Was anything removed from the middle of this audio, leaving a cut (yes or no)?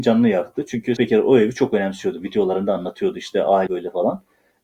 yes